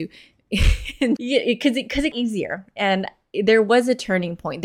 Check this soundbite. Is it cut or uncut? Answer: cut